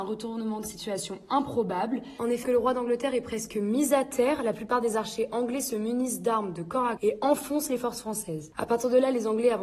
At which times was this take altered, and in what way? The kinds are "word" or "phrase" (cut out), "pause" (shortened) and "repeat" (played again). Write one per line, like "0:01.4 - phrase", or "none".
0:02.4 - word
0:07.0 - word